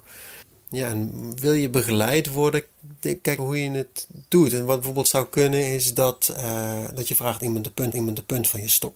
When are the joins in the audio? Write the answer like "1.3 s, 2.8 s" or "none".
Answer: 3.4 s, 7.9 s